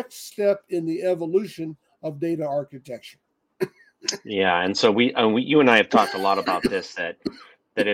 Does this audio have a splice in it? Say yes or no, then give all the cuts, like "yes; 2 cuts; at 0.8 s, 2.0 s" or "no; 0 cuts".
no; 0 cuts